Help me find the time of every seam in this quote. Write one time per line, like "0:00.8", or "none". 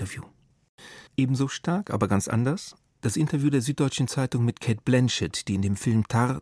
0:01.1